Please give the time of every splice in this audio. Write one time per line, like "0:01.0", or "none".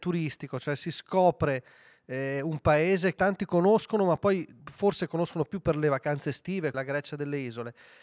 0:03.2
0:04.6
0:06.7